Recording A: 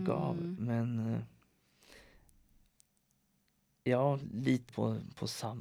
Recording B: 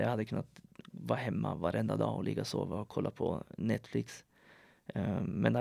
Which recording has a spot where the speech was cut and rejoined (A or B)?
A